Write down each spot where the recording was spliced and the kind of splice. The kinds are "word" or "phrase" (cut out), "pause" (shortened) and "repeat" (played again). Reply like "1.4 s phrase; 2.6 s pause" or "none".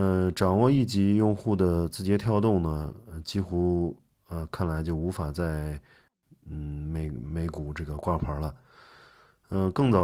none